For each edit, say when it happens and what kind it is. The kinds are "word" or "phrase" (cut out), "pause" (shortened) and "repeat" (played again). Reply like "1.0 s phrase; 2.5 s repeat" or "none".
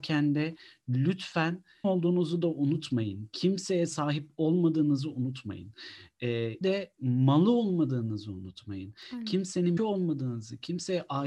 1.8 s word; 6.6 s word; 9.8 s word